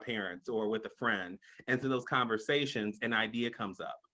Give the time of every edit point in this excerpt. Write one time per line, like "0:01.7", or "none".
0:01.8